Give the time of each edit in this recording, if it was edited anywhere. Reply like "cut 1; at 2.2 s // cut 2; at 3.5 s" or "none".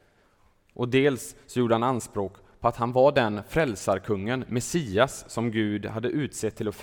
none